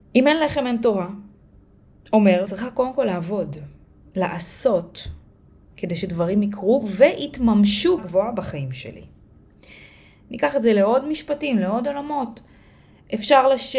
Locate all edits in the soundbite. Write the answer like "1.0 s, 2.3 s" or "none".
2.4 s, 8.0 s